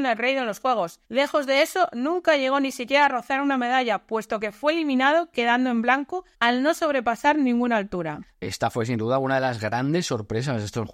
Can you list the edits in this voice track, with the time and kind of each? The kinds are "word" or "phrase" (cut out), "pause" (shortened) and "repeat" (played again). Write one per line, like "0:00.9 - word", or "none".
0:01.0 - pause
0:06.3 - pause
0:08.3 - pause